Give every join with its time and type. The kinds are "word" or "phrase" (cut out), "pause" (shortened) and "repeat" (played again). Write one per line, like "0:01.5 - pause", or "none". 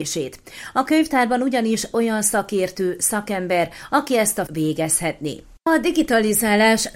0:01.9 - word
0:04.5 - word